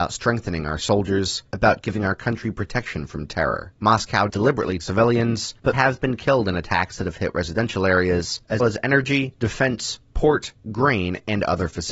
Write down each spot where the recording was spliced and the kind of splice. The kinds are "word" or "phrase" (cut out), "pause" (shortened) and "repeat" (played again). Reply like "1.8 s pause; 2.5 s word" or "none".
4.3 s word; 4.8 s word; 5.7 s word; 8.6 s word